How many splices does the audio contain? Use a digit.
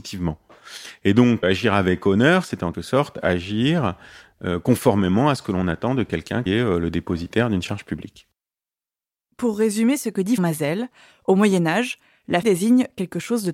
5